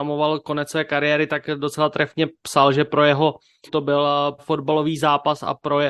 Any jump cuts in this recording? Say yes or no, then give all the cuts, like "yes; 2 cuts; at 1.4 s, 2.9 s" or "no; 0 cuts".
yes; 2 cuts; at 3.7 s, 4.4 s